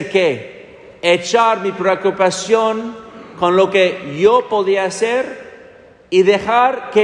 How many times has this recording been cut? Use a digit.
0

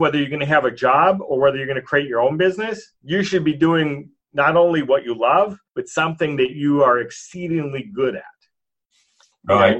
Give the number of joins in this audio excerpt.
2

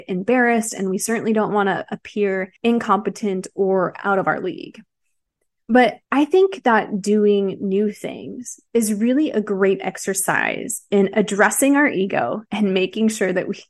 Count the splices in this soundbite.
3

